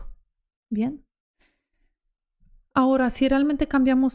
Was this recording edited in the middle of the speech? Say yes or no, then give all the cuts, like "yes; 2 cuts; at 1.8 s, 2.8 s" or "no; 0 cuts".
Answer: no; 0 cuts